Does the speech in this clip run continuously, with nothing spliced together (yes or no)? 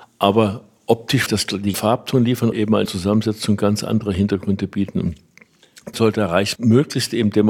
no